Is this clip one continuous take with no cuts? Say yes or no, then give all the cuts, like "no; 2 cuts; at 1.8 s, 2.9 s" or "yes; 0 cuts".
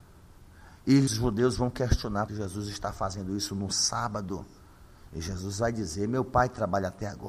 no; 2 cuts; at 1.1 s, 2.3 s